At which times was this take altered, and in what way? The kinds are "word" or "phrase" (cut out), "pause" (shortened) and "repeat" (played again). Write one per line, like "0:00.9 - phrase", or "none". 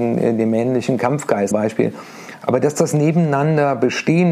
0:01.5 - word